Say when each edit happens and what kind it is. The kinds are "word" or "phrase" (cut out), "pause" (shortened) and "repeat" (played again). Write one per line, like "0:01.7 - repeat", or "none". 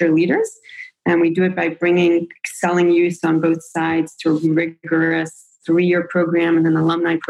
0:04.4 - word